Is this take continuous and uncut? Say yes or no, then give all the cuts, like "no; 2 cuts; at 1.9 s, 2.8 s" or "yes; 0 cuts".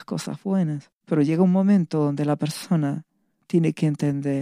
no; 1 cut; at 1.0 s